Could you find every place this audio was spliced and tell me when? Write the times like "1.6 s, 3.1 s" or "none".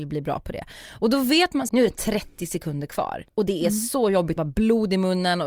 1.7 s, 3.3 s, 4.4 s